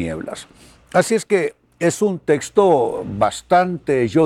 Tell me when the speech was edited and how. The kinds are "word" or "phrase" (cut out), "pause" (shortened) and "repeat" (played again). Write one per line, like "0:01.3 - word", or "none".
none